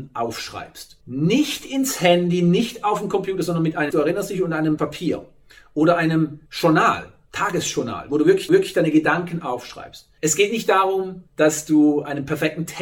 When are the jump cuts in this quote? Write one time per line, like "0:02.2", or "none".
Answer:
0:01.0
0:03.9
0:04.8
0:06.5
0:08.5
0:10.2
0:11.3

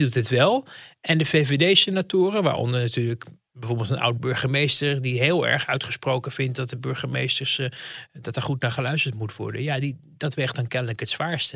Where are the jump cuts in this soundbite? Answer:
none

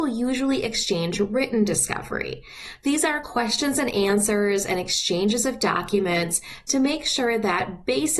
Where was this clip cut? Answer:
none

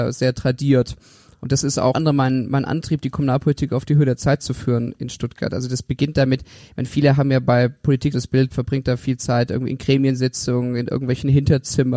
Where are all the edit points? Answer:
0:01.9
0:08.1
0:08.5

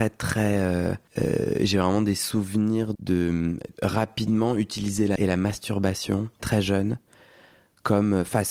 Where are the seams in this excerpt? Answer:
0:01.1
0:02.9
0:03.7
0:05.2
0:06.4

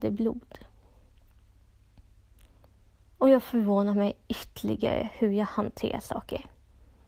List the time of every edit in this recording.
none

